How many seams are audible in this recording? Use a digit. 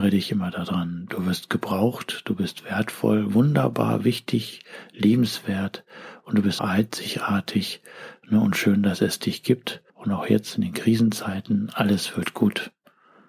2